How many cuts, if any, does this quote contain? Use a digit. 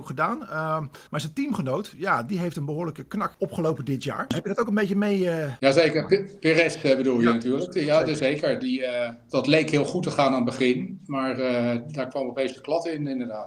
2